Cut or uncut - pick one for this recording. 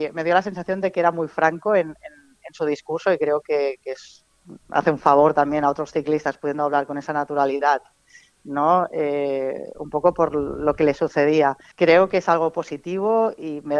cut